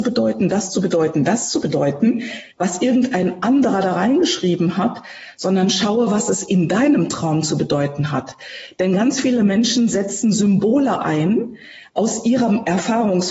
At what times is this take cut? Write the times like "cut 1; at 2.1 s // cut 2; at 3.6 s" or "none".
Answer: cut 1; at 2.5 s